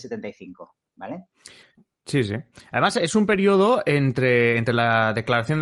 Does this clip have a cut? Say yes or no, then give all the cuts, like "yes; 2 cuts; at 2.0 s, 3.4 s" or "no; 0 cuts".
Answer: no; 0 cuts